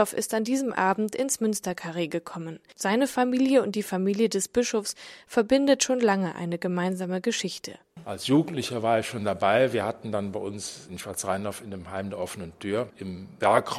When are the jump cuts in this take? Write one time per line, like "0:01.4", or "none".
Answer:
0:02.7